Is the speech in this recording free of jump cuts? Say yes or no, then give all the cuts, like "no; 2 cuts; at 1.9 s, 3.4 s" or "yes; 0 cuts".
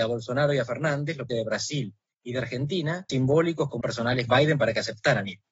no; 4 cuts; at 1.3 s, 3.1 s, 3.8 s, 4.3 s